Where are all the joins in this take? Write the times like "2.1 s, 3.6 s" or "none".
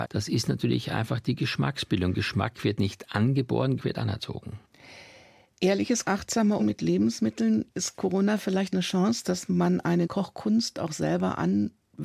3.8 s, 6.0 s, 6.6 s, 8.7 s, 10.0 s